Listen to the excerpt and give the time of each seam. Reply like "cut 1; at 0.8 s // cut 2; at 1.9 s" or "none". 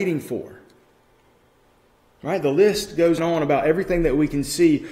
cut 1; at 3.2 s